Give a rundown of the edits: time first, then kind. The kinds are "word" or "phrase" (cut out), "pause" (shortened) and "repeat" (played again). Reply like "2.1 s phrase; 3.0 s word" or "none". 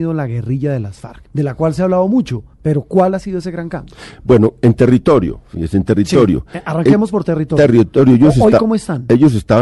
1.3 s pause; 2.5 s pause